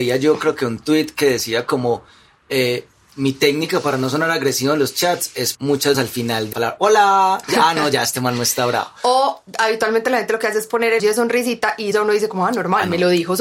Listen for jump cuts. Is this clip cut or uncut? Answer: cut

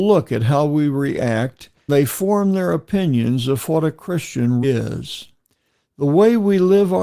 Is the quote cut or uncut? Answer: cut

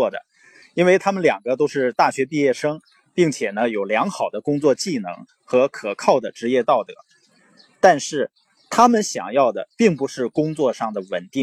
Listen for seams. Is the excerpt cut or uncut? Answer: uncut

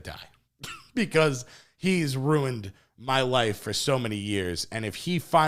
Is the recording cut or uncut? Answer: uncut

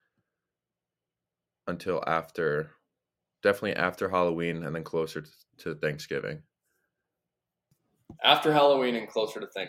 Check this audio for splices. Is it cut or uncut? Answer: uncut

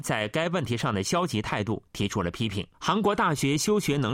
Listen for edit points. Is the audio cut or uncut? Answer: cut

